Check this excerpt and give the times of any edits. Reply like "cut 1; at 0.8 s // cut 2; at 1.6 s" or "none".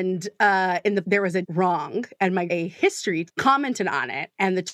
cut 1; at 1.0 s // cut 2; at 1.4 s // cut 3; at 2.5 s // cut 4; at 3.3 s